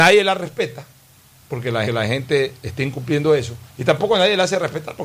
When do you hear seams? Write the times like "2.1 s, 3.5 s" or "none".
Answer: 1.9 s, 3.7 s